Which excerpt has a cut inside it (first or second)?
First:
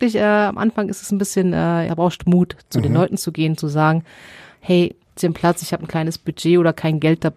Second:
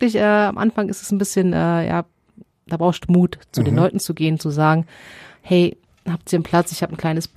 first